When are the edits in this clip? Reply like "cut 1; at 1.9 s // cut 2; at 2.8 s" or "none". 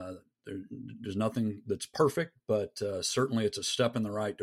none

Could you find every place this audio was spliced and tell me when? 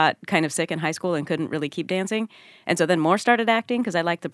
none

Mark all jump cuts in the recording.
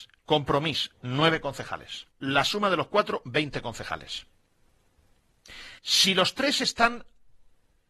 cut 1; at 2.1 s // cut 2; at 5.8 s

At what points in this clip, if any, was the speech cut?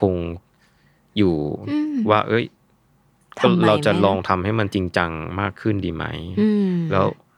none

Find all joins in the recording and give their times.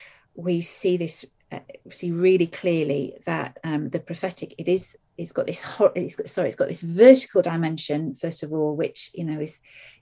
none

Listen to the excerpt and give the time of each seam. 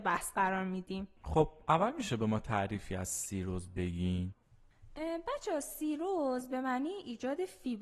cut 1; at 1.2 s

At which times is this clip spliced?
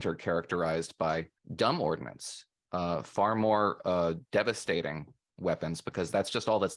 cut 1; at 1.4 s // cut 2; at 4.2 s

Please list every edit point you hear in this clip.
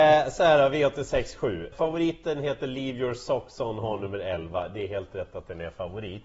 cut 1; at 1.7 s

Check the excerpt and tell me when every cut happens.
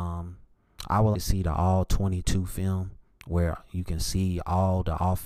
cut 1; at 1.1 s

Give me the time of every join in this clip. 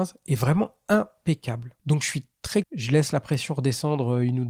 cut 1; at 1.8 s // cut 2; at 2.6 s

